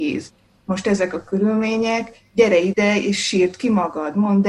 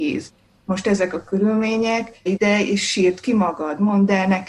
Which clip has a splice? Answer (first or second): second